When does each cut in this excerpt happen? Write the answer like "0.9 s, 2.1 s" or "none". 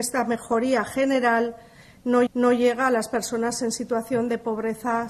2.3 s